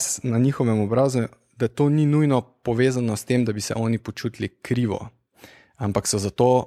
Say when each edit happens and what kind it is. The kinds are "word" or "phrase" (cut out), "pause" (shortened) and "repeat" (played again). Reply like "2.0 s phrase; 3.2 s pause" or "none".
none